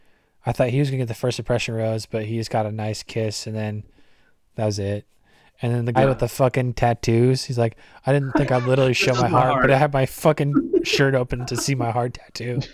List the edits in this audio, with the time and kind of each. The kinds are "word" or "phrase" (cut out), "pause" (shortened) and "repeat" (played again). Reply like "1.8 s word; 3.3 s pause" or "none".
5.9 s word